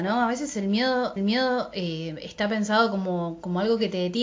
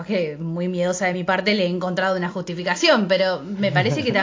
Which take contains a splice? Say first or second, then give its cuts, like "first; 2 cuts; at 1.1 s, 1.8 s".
first; 1 cut; at 1.2 s